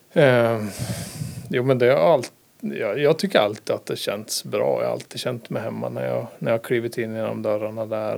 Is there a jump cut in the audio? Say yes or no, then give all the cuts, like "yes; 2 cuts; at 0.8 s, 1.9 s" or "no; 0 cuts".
no; 0 cuts